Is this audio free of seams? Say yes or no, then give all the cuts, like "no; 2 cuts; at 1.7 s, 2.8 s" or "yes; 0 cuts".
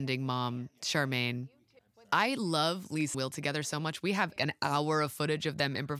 no; 3 cuts; at 1.8 s, 3.1 s, 4.4 s